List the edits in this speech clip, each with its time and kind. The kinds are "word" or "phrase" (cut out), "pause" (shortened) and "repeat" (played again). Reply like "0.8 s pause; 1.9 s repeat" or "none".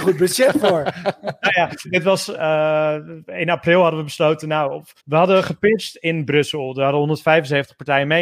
1.8 s word; 5.0 s pause